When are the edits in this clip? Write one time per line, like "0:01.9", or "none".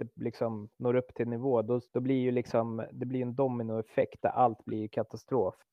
0:01.9